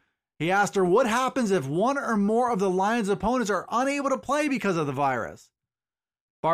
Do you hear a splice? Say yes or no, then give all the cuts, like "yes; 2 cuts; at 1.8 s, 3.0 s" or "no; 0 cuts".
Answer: no; 0 cuts